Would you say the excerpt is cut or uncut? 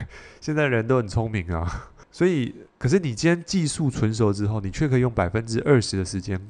cut